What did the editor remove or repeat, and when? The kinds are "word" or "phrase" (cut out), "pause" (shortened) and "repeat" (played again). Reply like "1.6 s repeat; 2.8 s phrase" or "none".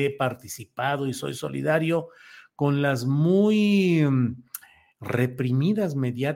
none